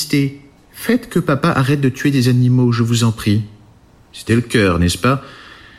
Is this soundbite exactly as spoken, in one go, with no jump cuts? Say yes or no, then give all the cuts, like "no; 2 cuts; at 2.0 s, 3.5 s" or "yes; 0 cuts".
no; 1 cut; at 4.3 s